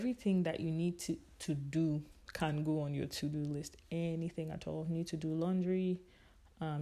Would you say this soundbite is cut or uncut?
uncut